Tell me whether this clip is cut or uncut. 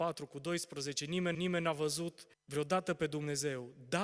cut